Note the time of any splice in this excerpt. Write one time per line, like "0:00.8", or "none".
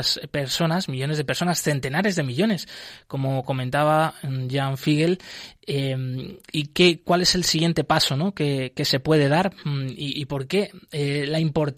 none